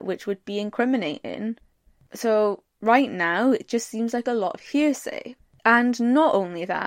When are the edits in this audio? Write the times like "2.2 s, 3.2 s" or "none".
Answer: none